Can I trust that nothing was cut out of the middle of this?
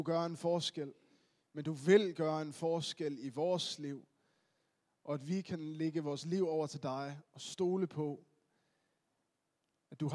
yes; 0 cuts

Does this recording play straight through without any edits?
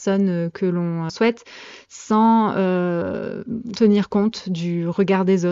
no; 2 cuts; at 1.1 s, 3.8 s

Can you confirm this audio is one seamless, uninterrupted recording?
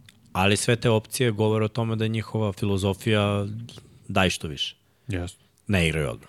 no; 1 cut; at 4.0 s

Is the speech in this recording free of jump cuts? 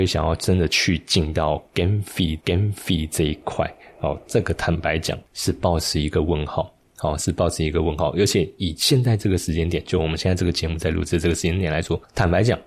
no; 1 cut; at 2.4 s

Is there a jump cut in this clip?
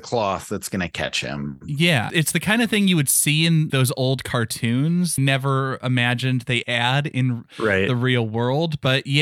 yes; 4 cuts; at 2.1 s, 3.7 s, 5.2 s, 6.6 s

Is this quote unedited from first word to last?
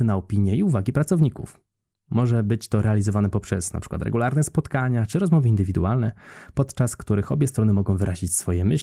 yes; 0 cuts

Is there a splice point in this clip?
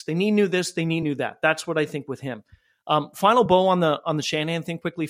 no; 0 cuts

